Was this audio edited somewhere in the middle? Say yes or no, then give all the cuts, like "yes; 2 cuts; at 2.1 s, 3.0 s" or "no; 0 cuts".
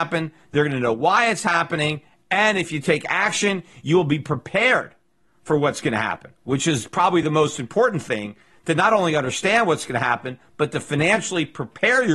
no; 0 cuts